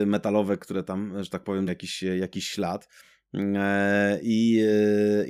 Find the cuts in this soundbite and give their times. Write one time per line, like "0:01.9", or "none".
0:01.7